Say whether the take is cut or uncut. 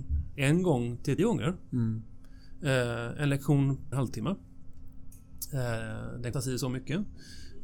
cut